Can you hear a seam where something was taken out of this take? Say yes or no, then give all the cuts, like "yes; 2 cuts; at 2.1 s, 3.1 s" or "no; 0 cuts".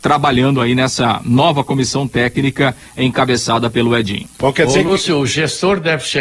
no; 0 cuts